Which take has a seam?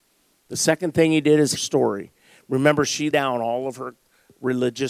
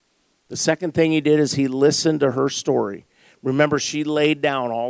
first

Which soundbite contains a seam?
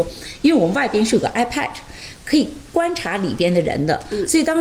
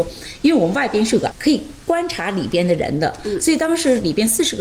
second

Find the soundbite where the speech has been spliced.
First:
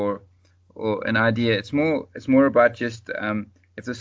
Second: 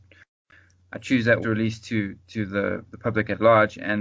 second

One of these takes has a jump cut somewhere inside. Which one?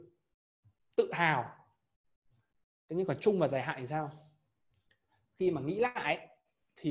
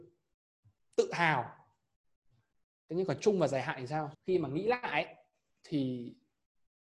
second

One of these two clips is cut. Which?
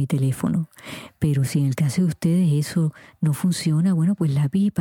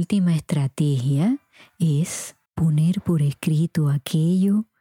second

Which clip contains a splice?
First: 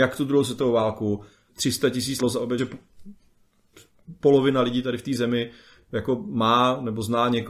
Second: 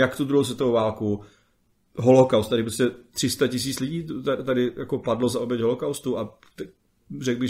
first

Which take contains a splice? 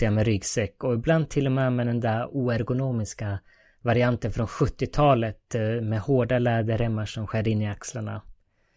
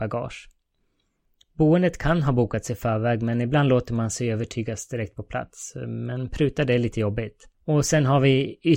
second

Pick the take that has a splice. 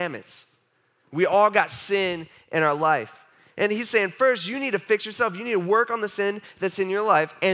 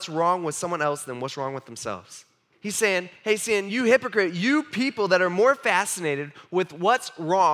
second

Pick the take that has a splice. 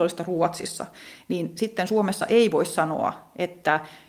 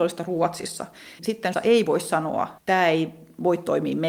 second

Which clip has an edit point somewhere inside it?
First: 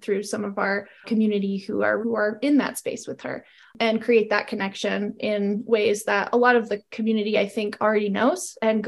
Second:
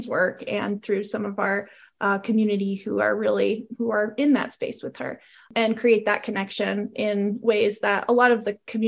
first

